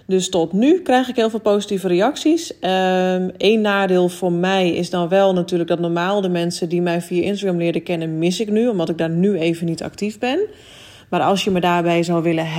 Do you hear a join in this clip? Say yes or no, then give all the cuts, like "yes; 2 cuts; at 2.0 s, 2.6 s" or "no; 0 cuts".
no; 0 cuts